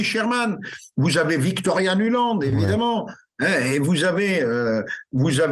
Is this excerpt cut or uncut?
uncut